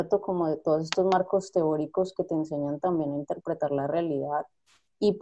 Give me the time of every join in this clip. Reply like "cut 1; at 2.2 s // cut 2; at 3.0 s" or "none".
none